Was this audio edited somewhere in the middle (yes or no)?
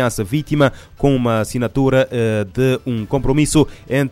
no